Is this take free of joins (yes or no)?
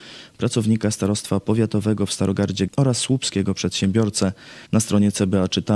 no